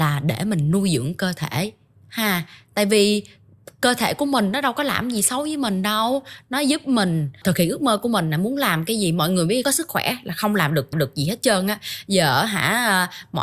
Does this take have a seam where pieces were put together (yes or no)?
yes